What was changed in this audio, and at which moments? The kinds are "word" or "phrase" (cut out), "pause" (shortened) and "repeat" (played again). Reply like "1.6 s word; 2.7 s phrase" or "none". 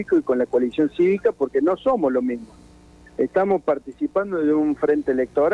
none

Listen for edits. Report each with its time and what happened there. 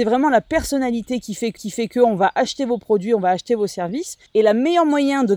1.6 s repeat; 4.3 s pause

